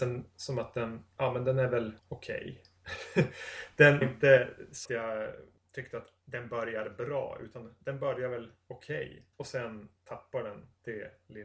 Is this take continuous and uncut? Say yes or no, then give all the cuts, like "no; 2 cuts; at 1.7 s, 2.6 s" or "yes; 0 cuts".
no; 3 cuts; at 2.0 s, 4.0 s, 4.9 s